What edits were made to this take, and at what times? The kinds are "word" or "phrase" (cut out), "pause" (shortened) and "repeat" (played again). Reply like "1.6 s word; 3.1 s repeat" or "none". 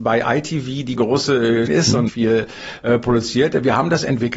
1.0 s word; 1.7 s word; 2.1 s word